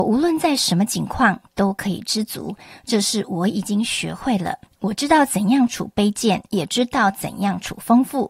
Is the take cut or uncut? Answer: cut